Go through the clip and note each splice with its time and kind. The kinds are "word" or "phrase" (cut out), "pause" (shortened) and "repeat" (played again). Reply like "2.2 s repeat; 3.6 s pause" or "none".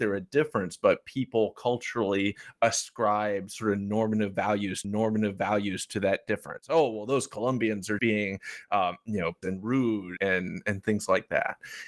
4.8 s repeat; 8.0 s word; 9.4 s word; 10.2 s word

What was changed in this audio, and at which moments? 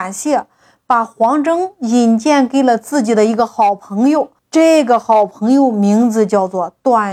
4.4 s pause

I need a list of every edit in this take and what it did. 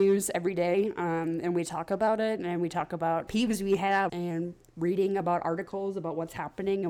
3.3 s phrase; 4.1 s phrase

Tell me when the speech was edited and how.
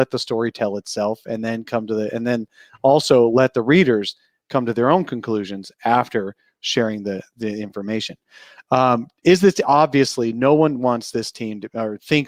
none

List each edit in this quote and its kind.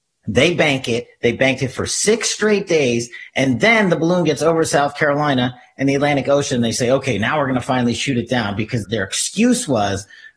8.8 s word

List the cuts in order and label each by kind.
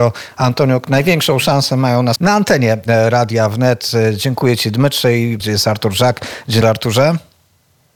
2.2 s word; 5.4 s phrase; 6.6 s word

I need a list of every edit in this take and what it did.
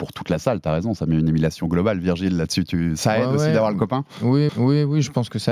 4.5 s repeat

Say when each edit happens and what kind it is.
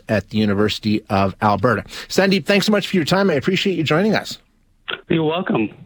none

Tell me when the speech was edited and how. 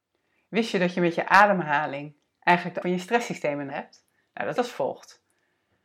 2.8 s word; 3.7 s word; 4.6 s word

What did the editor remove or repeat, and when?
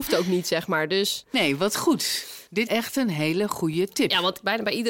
2.7 s word

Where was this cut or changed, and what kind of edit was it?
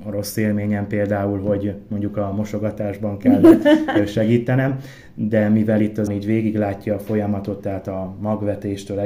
6.1 s word

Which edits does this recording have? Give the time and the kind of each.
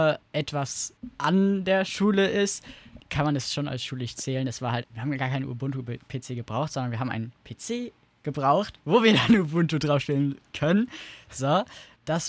4.8 s word

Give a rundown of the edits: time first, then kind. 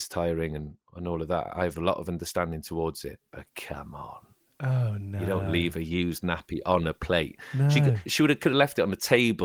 8.1 s word

